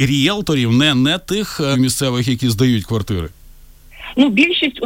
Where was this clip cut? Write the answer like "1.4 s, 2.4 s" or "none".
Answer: 1.7 s